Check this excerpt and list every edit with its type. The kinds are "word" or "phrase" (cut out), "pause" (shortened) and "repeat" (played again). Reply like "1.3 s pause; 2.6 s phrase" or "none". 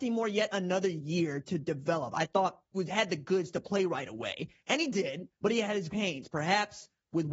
2.7 s word; 5.3 s pause; 5.9 s word